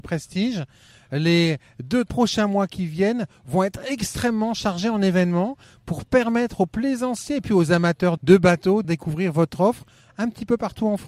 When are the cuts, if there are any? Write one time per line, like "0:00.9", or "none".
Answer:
0:02.1
0:08.2
0:08.8